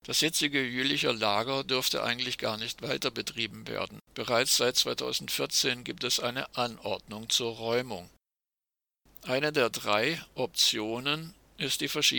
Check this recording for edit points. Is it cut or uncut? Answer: cut